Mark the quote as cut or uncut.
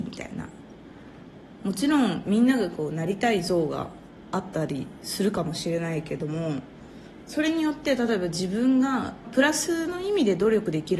cut